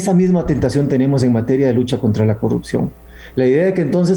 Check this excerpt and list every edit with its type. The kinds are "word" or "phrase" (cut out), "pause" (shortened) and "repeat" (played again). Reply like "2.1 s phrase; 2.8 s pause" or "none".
none

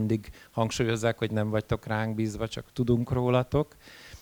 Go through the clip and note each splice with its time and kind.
2.7 s pause

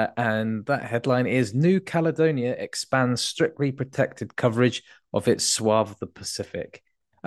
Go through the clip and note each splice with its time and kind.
none

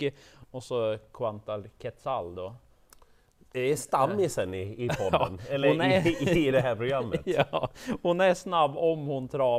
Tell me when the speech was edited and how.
none

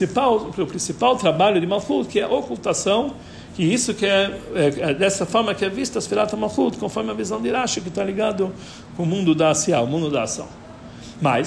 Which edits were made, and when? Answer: none

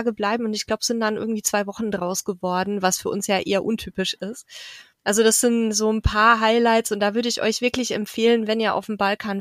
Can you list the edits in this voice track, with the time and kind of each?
4.9 s pause

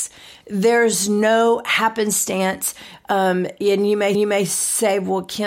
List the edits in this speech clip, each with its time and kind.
4.1 s repeat

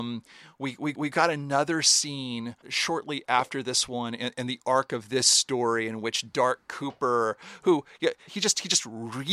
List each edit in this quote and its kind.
0.9 s repeat; 2.6 s pause; 8.3 s word

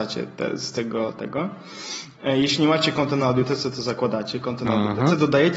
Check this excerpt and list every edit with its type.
none

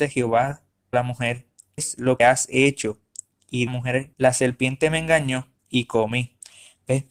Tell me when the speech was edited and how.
0.9 s phrase; 1.8 s word; 2.2 s word; 3.7 s phrase; 4.1 s pause; 5.6 s pause

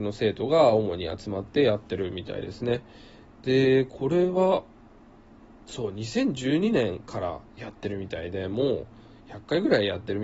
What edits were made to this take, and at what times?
none

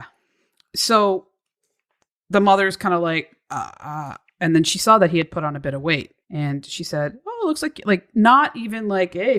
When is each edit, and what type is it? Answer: 6.2 s pause

